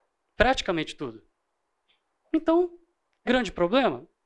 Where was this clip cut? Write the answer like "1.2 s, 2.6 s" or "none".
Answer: 3.3 s